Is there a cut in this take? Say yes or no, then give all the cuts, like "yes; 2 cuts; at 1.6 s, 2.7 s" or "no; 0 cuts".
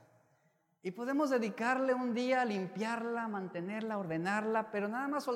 no; 0 cuts